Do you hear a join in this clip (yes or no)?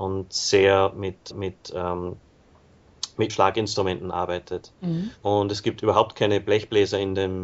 yes